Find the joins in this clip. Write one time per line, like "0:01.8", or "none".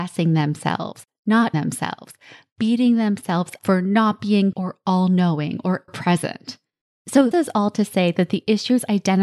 0:01.5
0:03.6
0:04.5
0:05.9
0:07.3